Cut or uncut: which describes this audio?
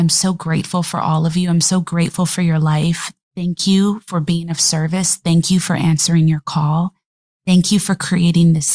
uncut